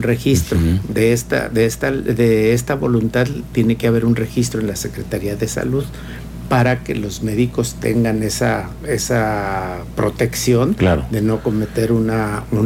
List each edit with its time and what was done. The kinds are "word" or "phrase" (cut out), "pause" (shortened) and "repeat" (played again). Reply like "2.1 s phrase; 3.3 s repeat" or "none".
none